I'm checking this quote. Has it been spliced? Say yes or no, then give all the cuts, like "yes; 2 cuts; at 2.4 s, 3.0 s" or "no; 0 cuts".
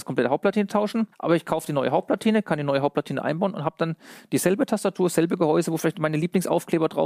yes; 1 cut; at 1.1 s